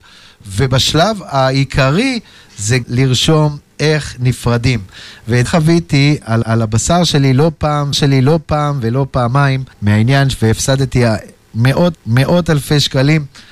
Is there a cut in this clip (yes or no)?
yes